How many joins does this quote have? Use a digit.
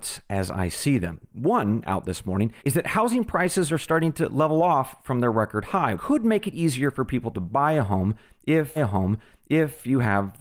3